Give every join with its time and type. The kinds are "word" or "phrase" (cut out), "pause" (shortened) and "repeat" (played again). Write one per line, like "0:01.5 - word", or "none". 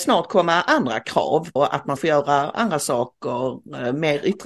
0:01.6 - word
0:02.0 - word